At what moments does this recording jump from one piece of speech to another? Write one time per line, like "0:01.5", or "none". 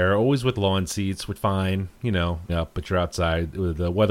0:01.4
0:02.0
0:02.5